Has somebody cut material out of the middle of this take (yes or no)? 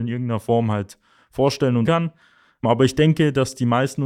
yes